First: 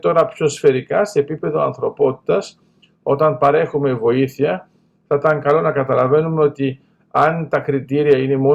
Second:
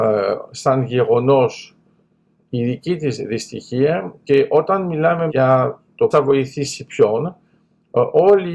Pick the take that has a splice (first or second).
second